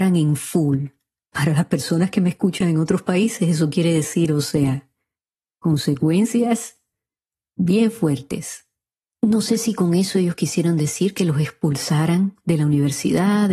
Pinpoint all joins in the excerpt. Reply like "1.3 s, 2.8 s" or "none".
none